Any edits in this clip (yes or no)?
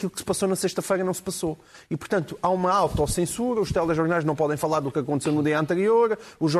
no